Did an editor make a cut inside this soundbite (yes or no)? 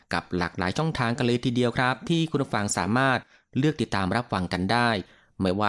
no